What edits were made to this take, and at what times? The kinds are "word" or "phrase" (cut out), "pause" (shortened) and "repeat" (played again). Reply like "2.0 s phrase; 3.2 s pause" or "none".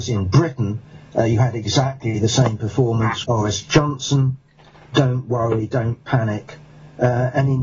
3.2 s word